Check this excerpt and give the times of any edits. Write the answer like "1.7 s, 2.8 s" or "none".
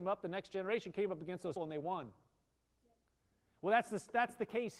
1.6 s